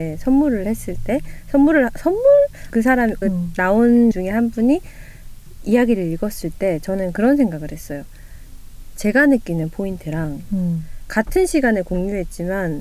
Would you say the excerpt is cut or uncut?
cut